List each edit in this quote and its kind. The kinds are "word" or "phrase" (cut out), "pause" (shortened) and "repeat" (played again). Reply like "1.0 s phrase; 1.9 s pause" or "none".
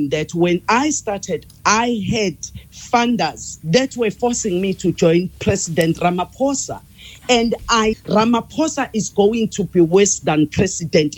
1.5 s word; 7.9 s word